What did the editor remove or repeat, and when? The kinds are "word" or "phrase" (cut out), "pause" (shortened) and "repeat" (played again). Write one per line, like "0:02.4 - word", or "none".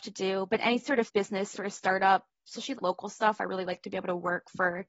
0:01.1 - word
0:01.5 - word
0:02.8 - word

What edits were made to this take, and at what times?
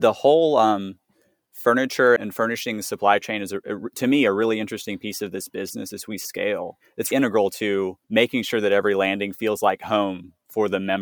0:02.2 - word
0:07.1 - word
0:08.0 - pause

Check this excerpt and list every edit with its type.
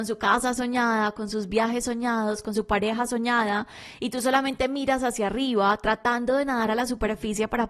none

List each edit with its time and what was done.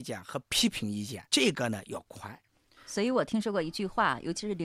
0:01.3 - pause

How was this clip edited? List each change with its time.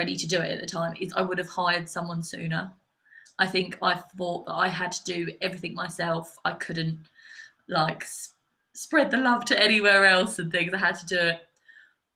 none

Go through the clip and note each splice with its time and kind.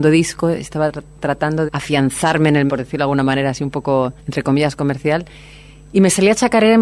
0:01.7 - word
0:02.7 - phrase
0:04.2 - pause

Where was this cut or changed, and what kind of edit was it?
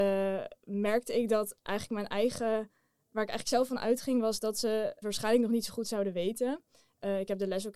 0:05.0 - word

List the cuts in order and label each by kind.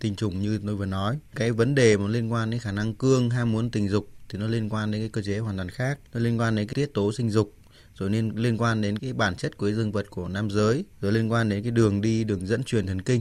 0:06.1 - pause
0:06.7 - word
0:09.0 - word
0:10.9 - pause

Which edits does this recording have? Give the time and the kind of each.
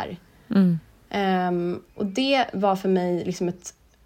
none

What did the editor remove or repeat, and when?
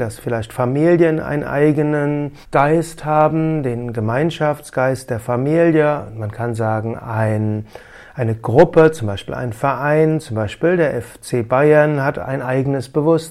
0:02.4 - pause

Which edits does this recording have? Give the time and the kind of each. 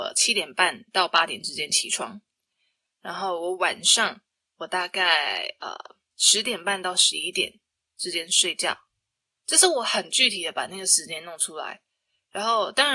none

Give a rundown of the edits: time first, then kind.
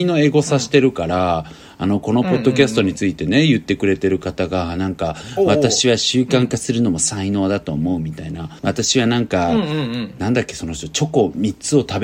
0:08.6 - pause

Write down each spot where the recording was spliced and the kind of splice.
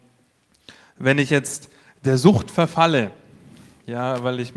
none

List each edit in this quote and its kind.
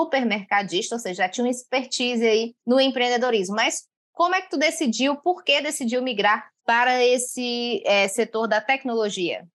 0:02.6 - pause
0:06.6 - pause

